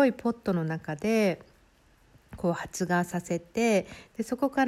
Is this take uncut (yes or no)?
yes